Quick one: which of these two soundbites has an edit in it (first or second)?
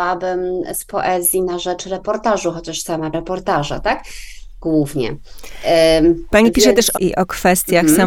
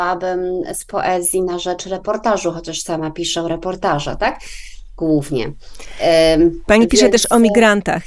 first